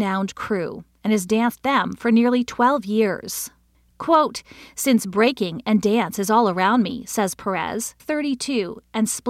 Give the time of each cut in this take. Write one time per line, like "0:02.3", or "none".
0:01.6
0:08.0